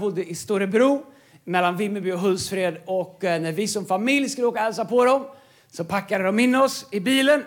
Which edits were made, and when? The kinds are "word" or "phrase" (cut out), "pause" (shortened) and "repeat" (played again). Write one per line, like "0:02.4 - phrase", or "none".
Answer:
none